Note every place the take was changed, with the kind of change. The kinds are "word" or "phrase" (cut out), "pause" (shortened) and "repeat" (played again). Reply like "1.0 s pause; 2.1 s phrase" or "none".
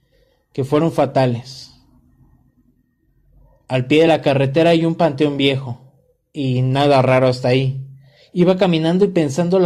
none

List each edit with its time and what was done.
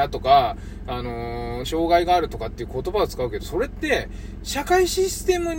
1.6 s word

